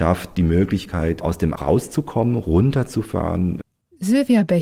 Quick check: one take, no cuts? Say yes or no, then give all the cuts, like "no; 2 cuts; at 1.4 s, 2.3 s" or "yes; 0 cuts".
no; 1 cut; at 1.6 s